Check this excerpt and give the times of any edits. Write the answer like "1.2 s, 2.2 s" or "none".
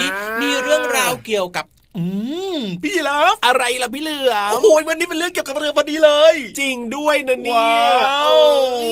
none

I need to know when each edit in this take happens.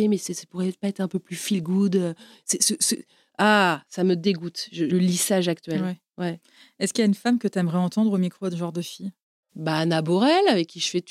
4.9 s

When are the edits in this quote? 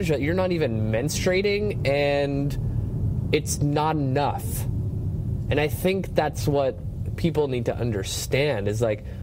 none

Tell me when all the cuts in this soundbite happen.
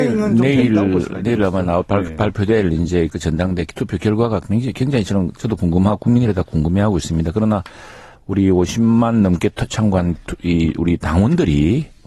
none

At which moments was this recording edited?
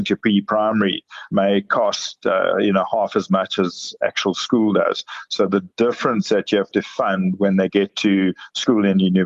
none

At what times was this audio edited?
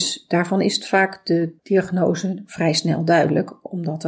1.6 s

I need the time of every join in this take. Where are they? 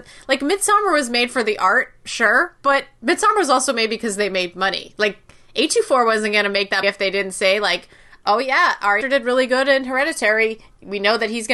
6.8 s, 9.0 s

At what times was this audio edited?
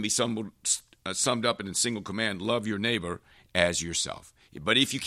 none

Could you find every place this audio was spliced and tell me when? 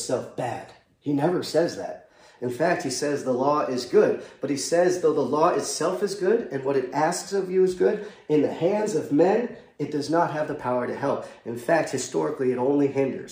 none

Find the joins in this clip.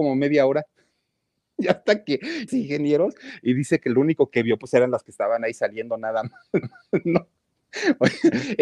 2.5 s, 5.0 s, 6.6 s

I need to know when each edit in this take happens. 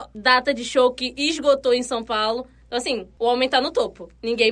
none

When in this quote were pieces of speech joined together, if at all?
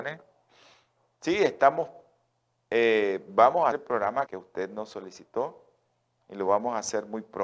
3.7 s, 4.3 s

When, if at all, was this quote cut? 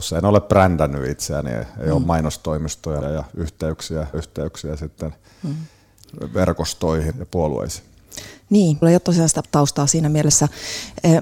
3.0 s, 4.1 s, 7.1 s, 8.8 s, 9.4 s

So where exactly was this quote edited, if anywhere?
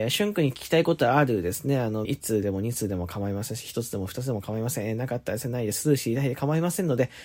2.0 s

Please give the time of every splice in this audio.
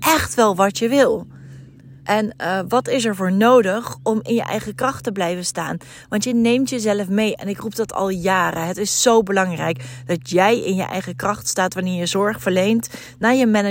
2.0 s

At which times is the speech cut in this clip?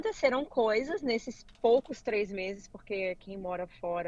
1.5 s

